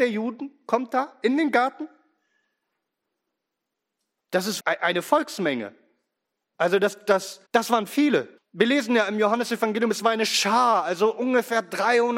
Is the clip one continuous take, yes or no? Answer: no